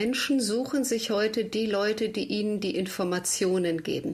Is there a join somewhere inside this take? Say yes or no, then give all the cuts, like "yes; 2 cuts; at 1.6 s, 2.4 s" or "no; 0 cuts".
no; 0 cuts